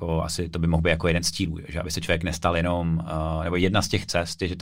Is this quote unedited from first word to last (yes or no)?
yes